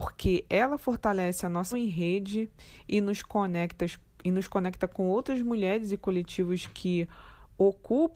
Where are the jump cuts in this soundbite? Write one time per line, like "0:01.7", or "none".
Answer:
0:01.7